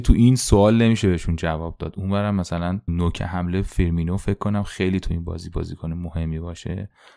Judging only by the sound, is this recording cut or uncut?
cut